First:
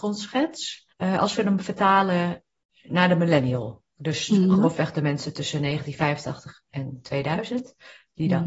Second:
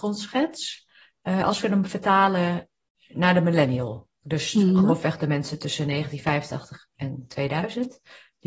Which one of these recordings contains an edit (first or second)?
first